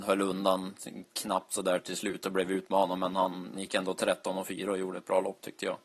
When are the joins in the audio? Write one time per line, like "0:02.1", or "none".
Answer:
0:03.5